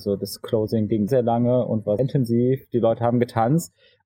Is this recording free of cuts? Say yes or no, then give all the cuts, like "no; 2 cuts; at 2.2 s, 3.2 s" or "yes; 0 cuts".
no; 2 cuts; at 1.1 s, 2.0 s